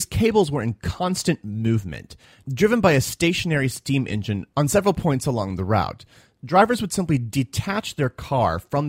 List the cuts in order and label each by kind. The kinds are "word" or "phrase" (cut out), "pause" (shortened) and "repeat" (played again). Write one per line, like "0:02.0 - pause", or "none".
none

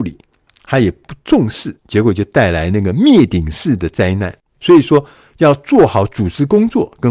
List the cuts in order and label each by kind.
0:01.8 - pause

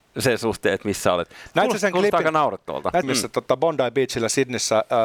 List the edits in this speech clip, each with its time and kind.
0:03.0 - phrase

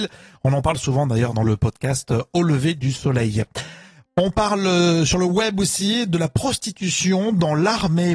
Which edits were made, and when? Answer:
none

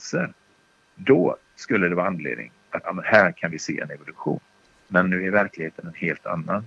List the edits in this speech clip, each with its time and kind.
0:02.8 - word

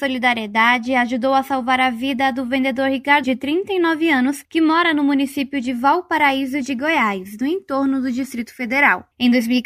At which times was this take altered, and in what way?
0:03.2 - word

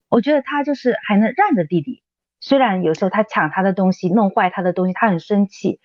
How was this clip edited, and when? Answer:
0:02.3 - pause

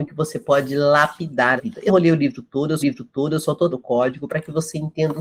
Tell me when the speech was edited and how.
0:01.6 - phrase
0:01.9 - word
0:02.8 - repeat
0:03.7 - word

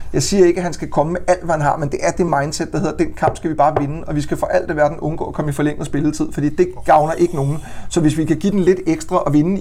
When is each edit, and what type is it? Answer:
none

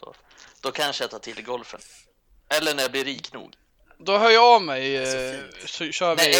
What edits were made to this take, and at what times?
none

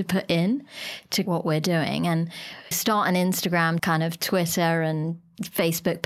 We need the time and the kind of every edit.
0:01.2 - word
0:02.7 - word
0:03.8 - word

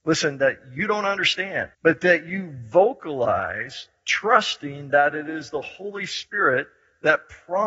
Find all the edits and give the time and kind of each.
0:01.7 - pause

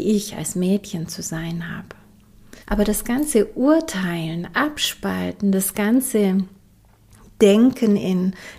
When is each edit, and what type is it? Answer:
0:02.6 - pause

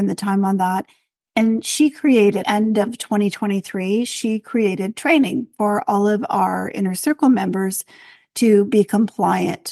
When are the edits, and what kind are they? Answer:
0:02.4 - phrase

